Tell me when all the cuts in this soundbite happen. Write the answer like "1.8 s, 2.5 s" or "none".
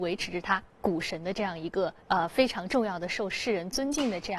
2.0 s